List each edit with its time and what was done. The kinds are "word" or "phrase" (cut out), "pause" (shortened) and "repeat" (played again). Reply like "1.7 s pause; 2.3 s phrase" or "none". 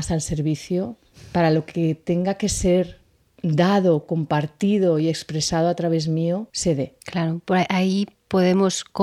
1.1 s pause; 6.5 s pause; 7.0 s pause